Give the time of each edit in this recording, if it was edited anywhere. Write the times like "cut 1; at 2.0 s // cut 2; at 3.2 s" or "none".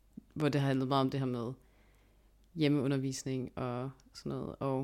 none